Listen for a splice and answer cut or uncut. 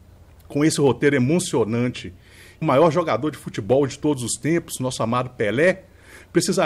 cut